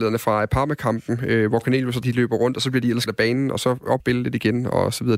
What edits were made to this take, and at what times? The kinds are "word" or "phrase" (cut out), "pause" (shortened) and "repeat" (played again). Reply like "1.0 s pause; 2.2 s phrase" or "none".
2.0 s word; 3.1 s word; 4.0 s word